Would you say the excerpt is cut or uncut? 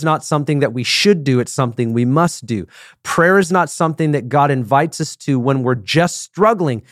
uncut